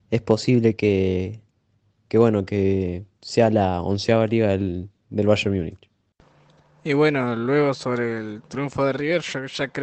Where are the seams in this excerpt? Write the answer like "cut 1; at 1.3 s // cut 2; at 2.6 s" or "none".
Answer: none